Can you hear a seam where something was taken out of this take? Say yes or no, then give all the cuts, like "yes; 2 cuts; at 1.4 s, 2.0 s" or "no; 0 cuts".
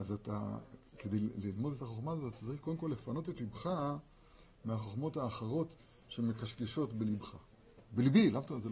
no; 0 cuts